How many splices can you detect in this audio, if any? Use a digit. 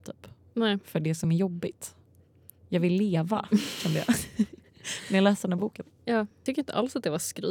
0